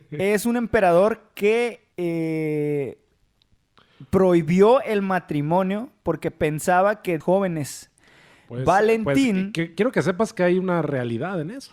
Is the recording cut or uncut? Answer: cut